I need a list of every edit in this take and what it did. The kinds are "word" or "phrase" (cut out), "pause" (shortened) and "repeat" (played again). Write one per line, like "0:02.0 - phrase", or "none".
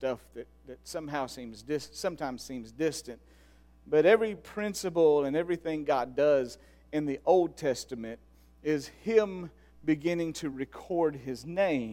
none